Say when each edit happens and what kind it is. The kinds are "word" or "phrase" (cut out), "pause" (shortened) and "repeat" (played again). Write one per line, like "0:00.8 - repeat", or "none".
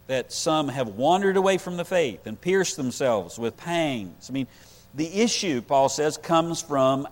0:03.5 - word